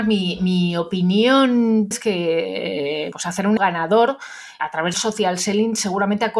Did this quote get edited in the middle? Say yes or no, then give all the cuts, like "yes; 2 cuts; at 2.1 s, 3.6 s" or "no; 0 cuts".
yes; 5 cuts; at 1.9 s, 3.1 s, 3.6 s, 4.6 s, 4.9 s